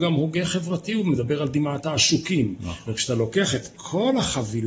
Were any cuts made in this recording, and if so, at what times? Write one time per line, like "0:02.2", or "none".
none